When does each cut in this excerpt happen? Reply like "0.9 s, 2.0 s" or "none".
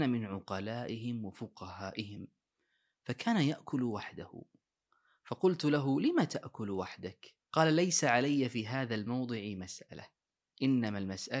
7.4 s